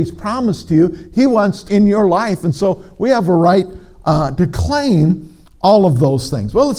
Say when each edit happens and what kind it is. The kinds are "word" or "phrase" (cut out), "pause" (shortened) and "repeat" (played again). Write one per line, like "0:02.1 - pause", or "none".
0:01.7 - word